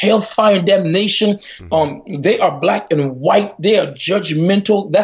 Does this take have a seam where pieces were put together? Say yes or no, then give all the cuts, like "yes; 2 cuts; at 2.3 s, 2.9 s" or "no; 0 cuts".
no; 0 cuts